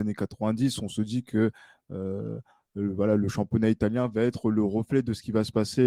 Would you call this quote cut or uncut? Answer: uncut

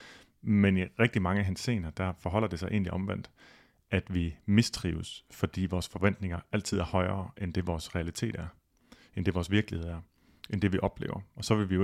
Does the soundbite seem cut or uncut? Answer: uncut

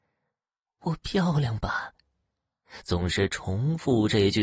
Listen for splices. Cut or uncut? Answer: uncut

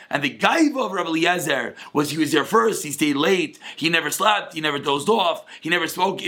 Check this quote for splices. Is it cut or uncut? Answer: uncut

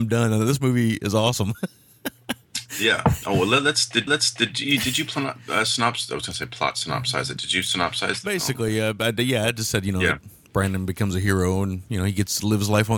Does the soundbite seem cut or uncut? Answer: cut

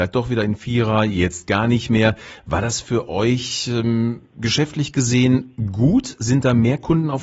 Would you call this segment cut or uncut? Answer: uncut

